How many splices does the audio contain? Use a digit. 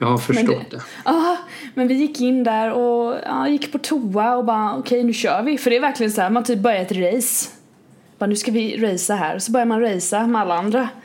0